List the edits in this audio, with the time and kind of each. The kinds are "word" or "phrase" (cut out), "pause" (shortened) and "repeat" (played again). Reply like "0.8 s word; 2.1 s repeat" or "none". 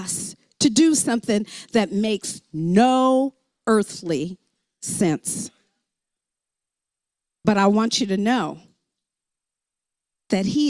none